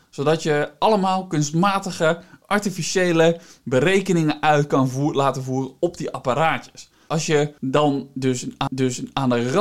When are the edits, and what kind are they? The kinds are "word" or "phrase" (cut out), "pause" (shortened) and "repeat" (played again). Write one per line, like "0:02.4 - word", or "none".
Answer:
0:08.7 - repeat